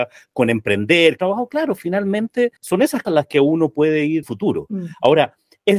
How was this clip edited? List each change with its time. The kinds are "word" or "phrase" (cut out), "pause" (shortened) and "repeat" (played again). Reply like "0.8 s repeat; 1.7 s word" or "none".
1.2 s phrase; 2.6 s pause; 3.0 s word; 4.2 s phrase